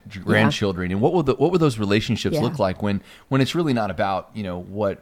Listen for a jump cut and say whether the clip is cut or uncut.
uncut